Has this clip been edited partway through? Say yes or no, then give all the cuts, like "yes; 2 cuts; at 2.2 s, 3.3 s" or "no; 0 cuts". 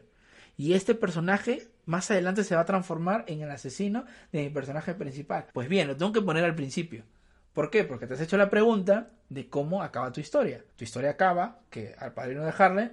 yes; 2 cuts; at 5.5 s, 10.7 s